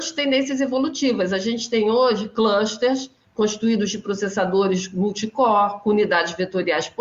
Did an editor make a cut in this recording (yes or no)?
no